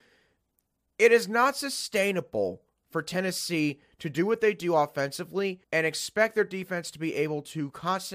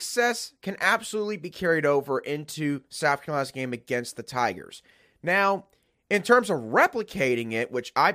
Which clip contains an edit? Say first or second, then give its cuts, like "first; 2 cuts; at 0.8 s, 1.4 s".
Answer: first; 1 cut; at 5.6 s